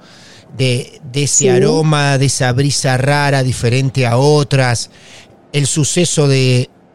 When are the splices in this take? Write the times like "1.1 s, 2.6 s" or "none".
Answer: none